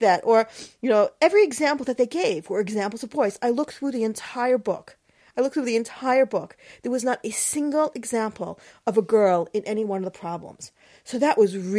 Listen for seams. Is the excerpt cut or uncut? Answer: uncut